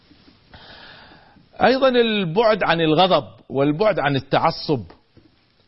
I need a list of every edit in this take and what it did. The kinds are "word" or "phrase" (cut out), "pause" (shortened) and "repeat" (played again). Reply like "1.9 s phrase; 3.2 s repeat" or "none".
none